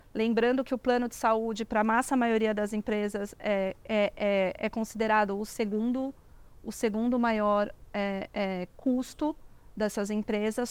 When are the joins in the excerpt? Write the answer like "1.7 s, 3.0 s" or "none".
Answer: none